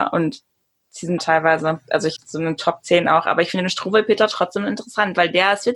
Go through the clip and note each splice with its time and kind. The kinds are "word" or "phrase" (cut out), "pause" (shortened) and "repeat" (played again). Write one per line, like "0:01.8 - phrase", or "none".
0:01.2 - phrase
0:02.2 - word

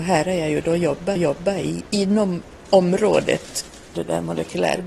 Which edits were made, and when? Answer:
0:01.2 - repeat
0:03.9 - word

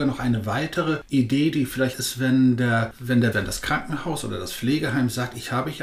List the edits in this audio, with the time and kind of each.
0:01.9 - word
0:03.3 - word

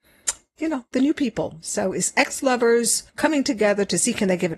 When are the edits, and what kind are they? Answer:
0:03.1 - pause

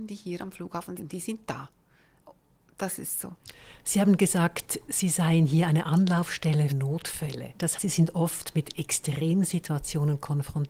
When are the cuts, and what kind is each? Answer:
0:01.0 - word
0:06.7 - word
0:07.8 - word

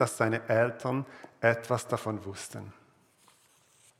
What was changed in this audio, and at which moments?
none

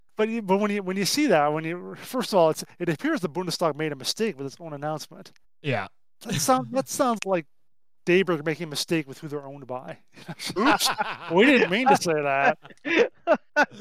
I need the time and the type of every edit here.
0:05.4 - pause
0:07.2 - word
0:10.6 - word

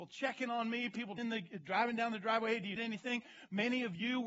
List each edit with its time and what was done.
0:01.2 - word
0:02.8 - word

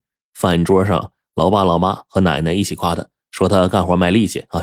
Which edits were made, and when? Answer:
none

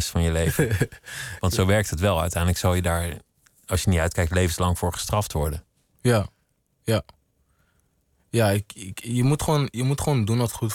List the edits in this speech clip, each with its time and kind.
none

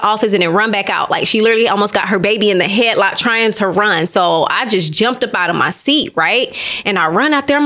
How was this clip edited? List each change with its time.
none

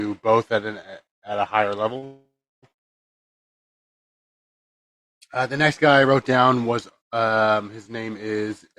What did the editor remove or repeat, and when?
none

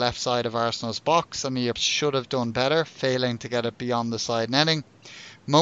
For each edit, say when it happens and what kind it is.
0:01.7 - word

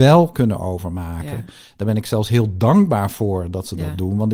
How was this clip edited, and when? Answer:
none

